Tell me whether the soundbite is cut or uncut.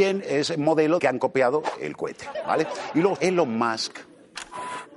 cut